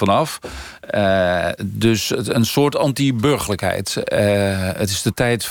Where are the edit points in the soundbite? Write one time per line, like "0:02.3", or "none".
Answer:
none